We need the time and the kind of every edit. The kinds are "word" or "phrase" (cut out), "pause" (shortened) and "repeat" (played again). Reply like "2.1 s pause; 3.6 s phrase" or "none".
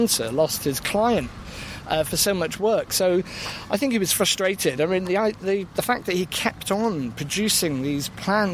none